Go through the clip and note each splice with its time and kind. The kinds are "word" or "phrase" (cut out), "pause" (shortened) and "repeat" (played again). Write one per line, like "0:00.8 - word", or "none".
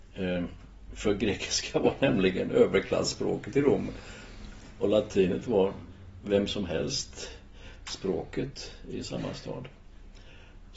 none